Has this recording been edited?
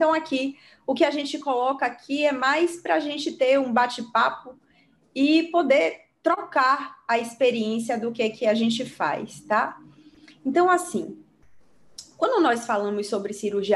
no; 0 cuts

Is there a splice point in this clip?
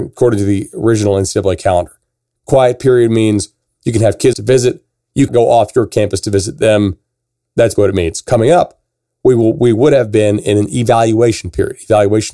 yes; 3 cuts; at 4.3 s, 5.3 s, 7.8 s

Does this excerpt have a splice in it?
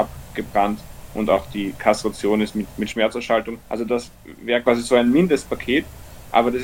yes; 1 cut; at 3.6 s

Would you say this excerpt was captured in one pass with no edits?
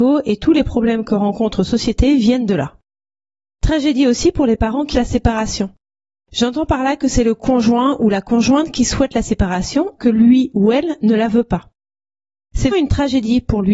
no; 4 cuts; at 1.6 s, 4.9 s, 10.0 s, 12.7 s

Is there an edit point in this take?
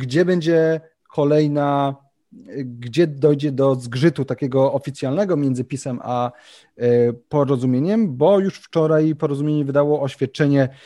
no; 0 cuts

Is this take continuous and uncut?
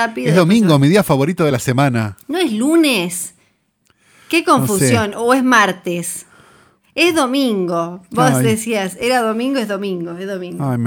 yes; 0 cuts

